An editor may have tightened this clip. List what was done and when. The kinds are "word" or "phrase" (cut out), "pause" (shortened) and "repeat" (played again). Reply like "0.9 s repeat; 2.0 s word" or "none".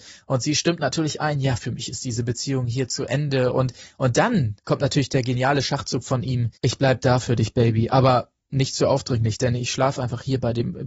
4.6 s pause; 6.6 s pause